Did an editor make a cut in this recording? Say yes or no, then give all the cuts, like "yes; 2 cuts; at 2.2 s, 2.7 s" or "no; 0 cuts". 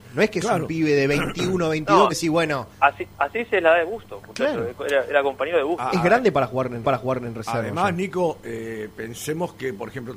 yes; 3 cuts; at 2.1 s, 2.7 s, 6.8 s